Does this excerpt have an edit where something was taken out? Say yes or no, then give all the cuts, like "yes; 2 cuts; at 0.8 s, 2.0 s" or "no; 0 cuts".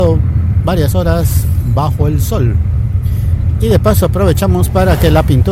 no; 0 cuts